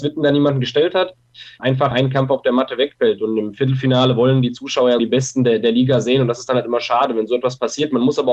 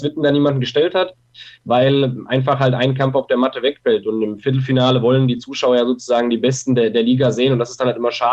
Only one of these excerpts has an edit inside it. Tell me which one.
first; 3 cuts; at 1.6 s, 1.9 s, 5.0 s

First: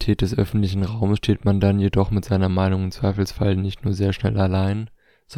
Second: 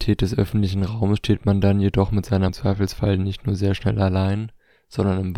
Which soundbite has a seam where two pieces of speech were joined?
second; 1 cut; at 2.5 s

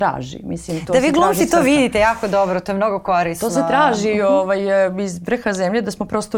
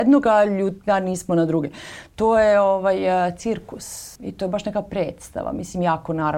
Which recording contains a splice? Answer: second; 1 cut; at 4.2 s

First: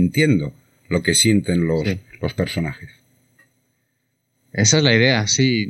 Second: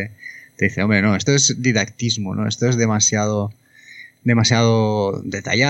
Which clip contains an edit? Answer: second; 1 cut; at 1.3 s

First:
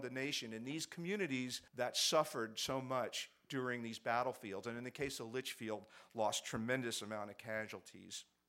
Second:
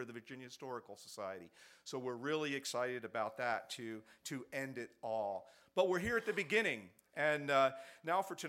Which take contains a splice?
first; 1 cut; at 1.7 s

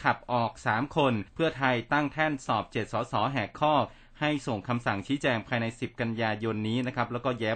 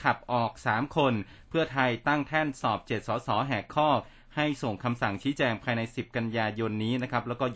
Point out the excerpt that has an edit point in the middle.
first; 1 cut; at 1.3 s

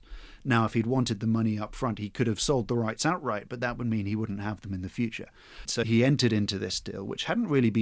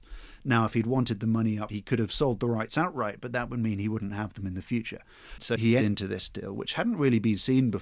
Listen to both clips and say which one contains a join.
second; 2 cuts; at 1.7 s, 5.8 s

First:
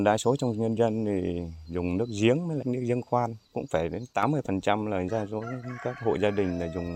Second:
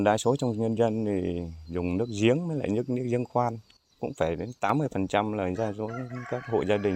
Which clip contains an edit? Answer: first; 2 cuts; at 2.6 s, 3.4 s

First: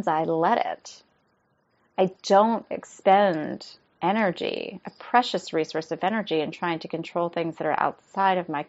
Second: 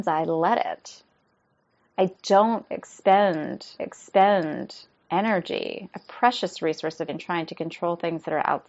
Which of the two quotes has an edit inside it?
second; 2 cuts; at 3.8 s, 7.1 s

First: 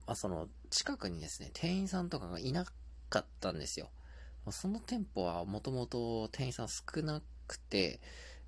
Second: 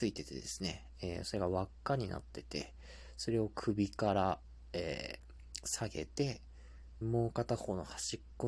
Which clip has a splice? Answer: second; 1 cut; at 7.0 s

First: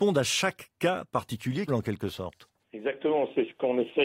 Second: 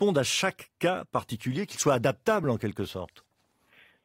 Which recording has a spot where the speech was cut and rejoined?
first; 2 cuts; at 1.7 s, 2.6 s

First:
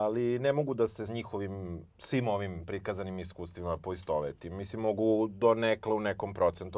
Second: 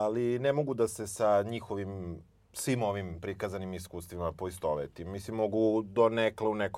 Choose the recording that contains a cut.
first; 2 cuts; at 1.1 s, 1.9 s

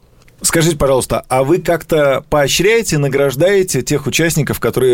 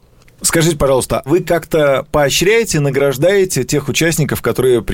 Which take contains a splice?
second; 1 cut; at 1.3 s

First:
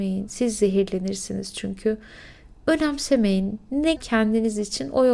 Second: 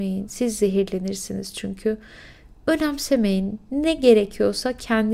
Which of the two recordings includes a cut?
first; 1 cut; at 4.0 s

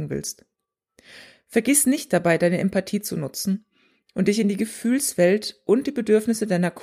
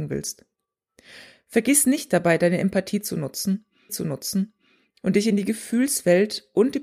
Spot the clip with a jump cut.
second; 1 cut; at 3.9 s

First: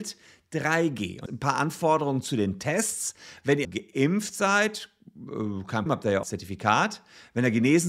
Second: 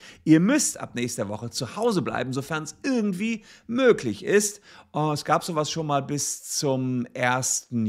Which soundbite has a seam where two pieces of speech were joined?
first; 4 cuts; at 1.3 s, 3.6 s, 5.9 s, 6.2 s

